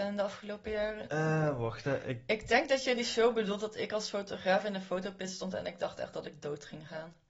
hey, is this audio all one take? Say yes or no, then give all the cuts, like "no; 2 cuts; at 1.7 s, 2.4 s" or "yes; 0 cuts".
yes; 0 cuts